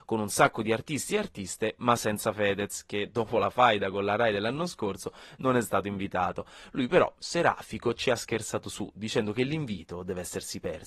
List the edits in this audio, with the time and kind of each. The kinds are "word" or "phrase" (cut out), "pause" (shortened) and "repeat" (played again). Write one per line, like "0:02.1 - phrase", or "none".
none